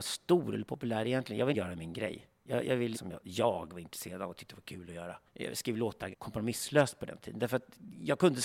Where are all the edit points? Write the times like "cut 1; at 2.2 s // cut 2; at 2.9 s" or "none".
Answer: cut 1; at 1.5 s // cut 2; at 2.9 s // cut 3; at 5.3 s // cut 4; at 6.1 s